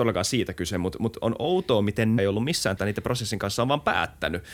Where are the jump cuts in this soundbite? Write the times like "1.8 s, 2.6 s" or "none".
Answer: 2.2 s, 2.8 s